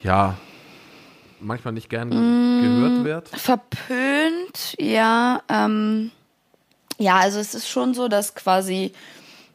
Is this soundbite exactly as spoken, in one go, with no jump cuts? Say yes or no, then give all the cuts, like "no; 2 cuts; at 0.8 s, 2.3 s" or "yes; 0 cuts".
yes; 0 cuts